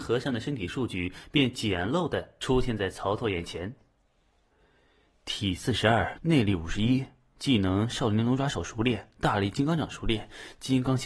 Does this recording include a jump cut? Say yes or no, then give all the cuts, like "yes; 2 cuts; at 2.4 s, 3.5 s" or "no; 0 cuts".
yes; 1 cut; at 6.2 s